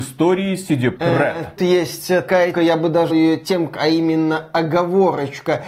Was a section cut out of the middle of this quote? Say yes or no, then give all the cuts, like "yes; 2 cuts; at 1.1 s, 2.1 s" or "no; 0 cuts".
yes; 5 cuts; at 1.0 s, 1.6 s, 2.5 s, 3.1 s, 3.7 s